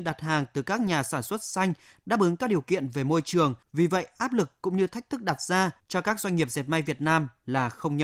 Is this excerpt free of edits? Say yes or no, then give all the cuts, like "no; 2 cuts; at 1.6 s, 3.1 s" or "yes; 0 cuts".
yes; 0 cuts